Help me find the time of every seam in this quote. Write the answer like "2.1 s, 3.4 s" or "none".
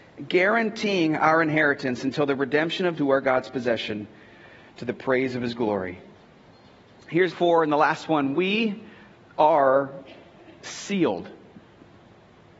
3.0 s, 7.3 s